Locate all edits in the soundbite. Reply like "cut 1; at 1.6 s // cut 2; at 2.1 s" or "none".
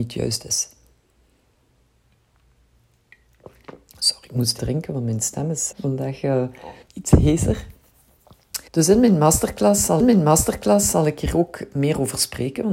cut 1; at 4.6 s // cut 2; at 5.7 s // cut 3; at 6.8 s // cut 4; at 8.7 s // cut 5; at 10.0 s